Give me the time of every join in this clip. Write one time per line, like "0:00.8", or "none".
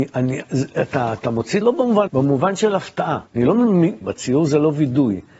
0:01.6
0:02.1
0:03.3
0:04.0